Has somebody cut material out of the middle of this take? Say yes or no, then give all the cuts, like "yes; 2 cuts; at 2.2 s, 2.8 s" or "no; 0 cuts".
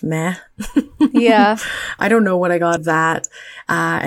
yes; 2 cuts; at 2.0 s, 2.8 s